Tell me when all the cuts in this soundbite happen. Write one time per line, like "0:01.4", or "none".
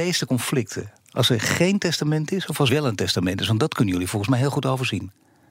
0:02.7